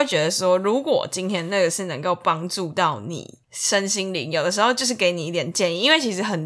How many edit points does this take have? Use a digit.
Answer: 1